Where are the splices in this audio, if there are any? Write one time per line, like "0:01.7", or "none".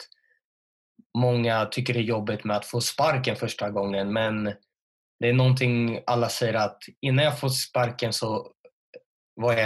none